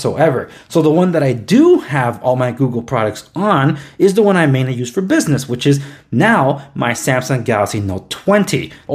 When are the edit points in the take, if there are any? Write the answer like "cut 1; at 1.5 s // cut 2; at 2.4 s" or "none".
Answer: none